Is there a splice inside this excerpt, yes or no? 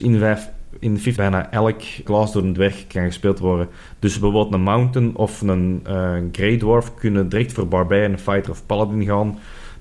yes